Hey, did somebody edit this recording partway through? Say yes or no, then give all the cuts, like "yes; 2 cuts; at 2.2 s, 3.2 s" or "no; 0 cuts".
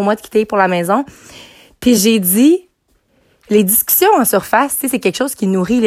no; 0 cuts